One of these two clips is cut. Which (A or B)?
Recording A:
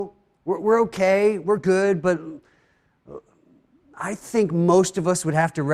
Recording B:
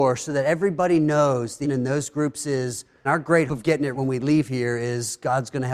B